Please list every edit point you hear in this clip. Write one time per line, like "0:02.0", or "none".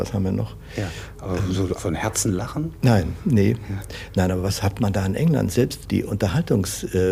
0:01.8
0:05.8